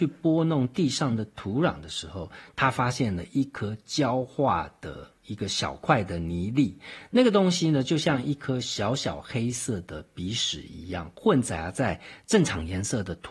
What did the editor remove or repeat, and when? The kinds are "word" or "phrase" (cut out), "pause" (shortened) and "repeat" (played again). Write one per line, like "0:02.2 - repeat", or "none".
0:05.2 - pause